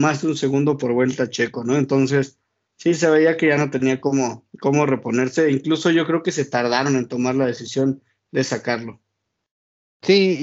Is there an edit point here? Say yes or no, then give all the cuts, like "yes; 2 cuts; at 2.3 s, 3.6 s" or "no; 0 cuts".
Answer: no; 0 cuts